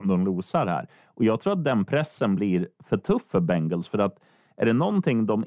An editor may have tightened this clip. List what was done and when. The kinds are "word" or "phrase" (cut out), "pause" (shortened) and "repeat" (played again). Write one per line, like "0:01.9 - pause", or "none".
none